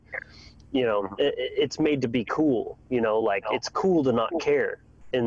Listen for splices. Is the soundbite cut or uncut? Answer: uncut